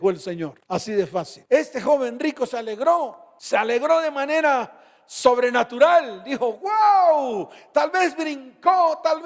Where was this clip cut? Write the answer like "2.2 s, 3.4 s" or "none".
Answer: none